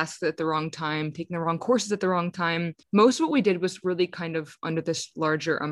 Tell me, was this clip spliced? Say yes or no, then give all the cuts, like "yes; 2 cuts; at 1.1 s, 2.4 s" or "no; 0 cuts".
yes; 1 cut; at 2.8 s